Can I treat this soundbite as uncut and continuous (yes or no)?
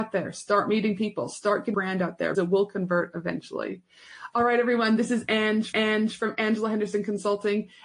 no